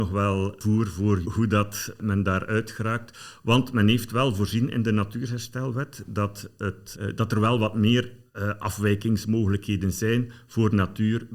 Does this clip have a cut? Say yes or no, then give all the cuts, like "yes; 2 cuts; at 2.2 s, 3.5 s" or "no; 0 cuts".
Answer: yes; 2 cuts; at 1.2 s, 6.9 s